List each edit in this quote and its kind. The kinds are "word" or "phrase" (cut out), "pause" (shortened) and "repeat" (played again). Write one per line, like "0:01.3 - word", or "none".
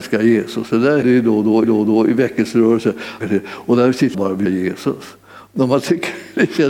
0:01.0 - word
0:01.6 - repeat
0:03.2 - phrase
0:04.1 - word
0:04.5 - word